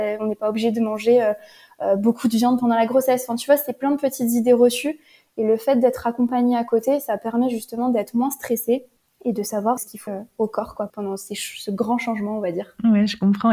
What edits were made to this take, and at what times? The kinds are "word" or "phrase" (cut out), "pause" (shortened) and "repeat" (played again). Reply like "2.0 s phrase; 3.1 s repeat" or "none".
9.8 s word; 10.1 s word; 10.9 s word

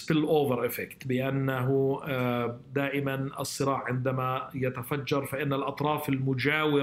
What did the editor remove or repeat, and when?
none

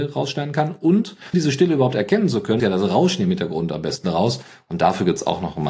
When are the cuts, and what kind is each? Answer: 1.3 s word; 2.6 s word

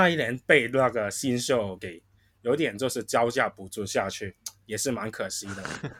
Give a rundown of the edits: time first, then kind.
1.8 s word

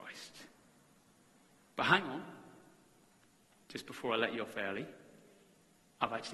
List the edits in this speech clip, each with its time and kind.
none

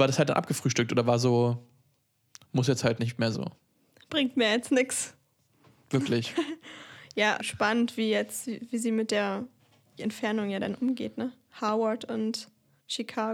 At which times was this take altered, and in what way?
3.3 s word; 7.4 s word; 10.0 s word

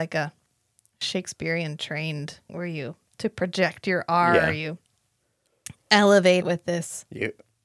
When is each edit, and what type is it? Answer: 2.5 s word; 6.4 s word

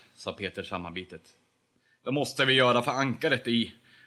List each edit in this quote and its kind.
none

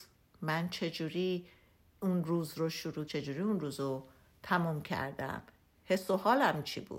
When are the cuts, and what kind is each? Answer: 3.1 s phrase

